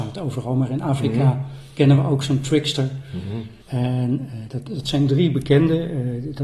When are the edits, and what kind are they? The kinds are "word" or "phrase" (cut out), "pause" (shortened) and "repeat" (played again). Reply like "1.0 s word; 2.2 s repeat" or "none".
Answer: 3.6 s pause